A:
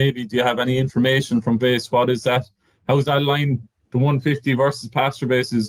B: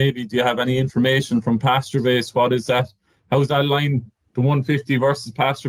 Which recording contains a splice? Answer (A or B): A